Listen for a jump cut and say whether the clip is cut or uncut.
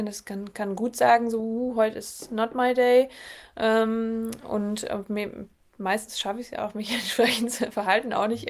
uncut